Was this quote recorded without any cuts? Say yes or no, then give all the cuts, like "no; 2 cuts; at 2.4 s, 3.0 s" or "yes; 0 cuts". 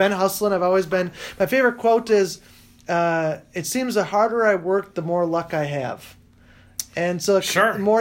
yes; 0 cuts